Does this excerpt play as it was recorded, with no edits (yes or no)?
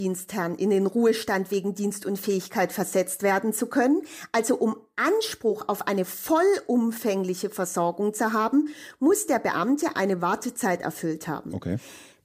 yes